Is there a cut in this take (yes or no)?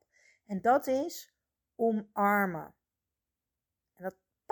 no